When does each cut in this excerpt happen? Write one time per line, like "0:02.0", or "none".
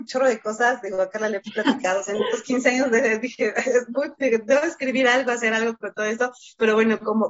none